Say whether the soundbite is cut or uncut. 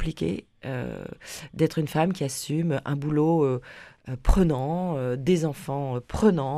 uncut